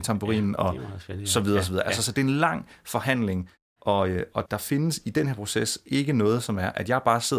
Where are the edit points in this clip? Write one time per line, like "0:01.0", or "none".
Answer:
0:04.5

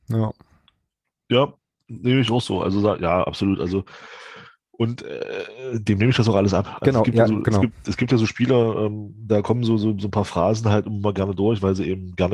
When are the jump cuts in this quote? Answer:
none

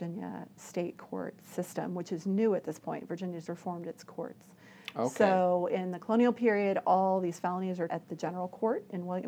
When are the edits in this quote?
0:03.5
0:07.9

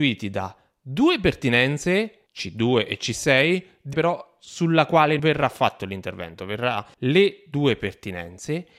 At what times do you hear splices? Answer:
0:02.3
0:03.9
0:05.2
0:06.9

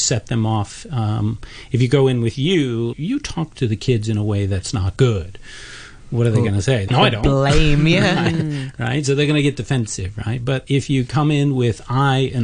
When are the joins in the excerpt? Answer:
0:02.9
0:06.9

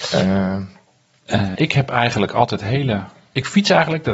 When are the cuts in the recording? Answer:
0:01.5

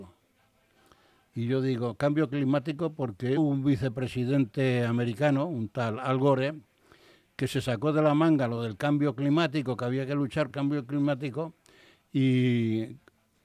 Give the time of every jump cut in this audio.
0:03.4
0:10.5

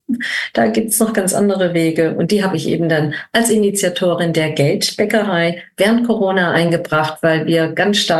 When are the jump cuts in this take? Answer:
none

